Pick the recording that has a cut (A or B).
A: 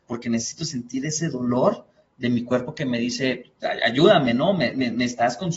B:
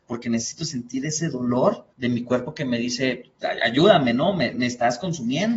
B